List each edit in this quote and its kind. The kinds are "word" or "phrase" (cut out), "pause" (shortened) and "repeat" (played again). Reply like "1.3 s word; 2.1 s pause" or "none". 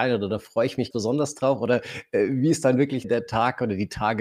0.9 s word; 3.0 s word